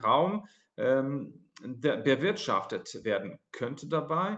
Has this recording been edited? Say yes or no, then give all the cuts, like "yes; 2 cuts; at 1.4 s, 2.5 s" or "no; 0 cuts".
no; 0 cuts